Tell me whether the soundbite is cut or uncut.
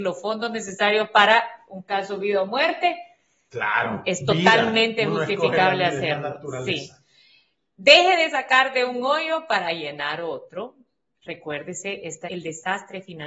cut